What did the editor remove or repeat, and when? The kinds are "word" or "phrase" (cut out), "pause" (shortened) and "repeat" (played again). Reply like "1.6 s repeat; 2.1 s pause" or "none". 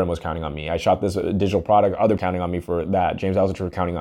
2.2 s word